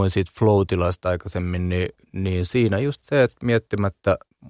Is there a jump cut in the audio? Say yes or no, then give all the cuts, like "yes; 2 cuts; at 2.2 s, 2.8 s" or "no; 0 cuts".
yes; 1 cut; at 2.0 s